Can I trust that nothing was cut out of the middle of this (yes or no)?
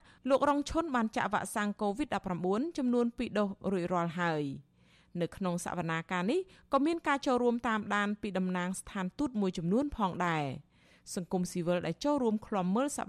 yes